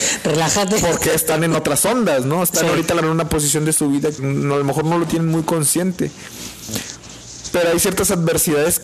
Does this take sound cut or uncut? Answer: cut